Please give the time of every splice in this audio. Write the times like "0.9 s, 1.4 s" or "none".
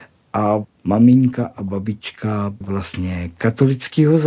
2.6 s